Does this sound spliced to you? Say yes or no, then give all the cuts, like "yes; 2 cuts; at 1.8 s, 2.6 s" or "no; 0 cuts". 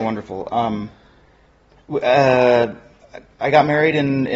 no; 0 cuts